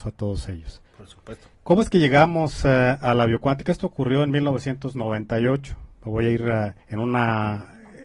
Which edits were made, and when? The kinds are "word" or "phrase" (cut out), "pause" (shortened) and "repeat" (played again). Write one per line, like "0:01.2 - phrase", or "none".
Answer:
0:01.5 - pause
0:06.8 - pause